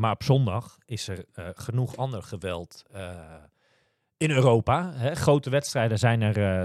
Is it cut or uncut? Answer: uncut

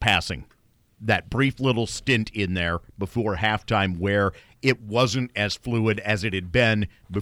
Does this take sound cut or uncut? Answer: uncut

